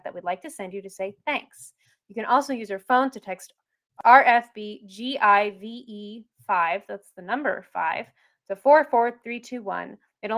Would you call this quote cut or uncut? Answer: uncut